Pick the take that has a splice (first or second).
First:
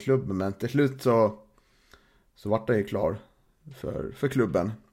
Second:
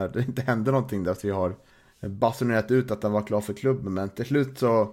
second